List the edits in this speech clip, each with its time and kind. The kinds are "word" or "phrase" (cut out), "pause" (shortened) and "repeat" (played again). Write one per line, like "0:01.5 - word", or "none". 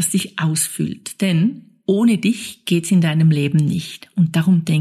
none